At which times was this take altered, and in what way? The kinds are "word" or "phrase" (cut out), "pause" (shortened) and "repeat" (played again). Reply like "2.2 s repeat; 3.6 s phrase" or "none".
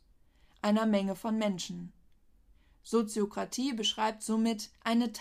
none